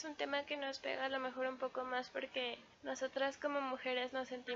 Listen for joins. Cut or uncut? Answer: cut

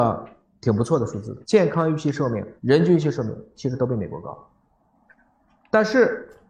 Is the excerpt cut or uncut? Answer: cut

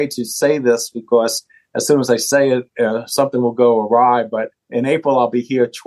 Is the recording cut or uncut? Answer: uncut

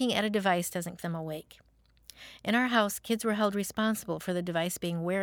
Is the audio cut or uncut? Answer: cut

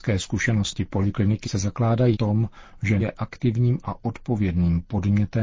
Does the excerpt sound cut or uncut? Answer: cut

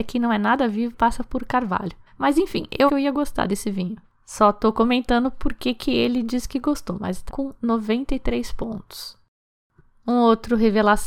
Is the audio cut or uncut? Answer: cut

